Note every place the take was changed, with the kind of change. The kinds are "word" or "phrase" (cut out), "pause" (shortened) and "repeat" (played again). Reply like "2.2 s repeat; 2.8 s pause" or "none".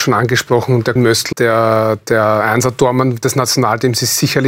1.0 s word; 1.3 s word